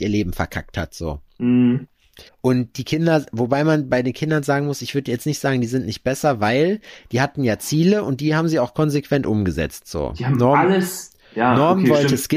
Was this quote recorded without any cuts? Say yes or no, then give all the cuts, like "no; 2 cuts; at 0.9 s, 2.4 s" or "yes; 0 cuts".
no; 1 cut; at 2.3 s